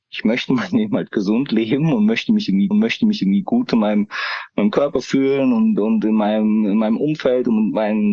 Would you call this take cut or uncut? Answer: cut